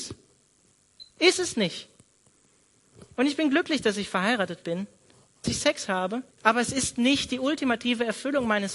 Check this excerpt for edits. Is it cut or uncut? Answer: cut